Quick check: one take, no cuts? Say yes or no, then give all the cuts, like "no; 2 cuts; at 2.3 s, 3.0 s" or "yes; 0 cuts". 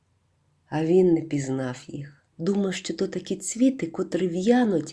no; 1 cut; at 2.3 s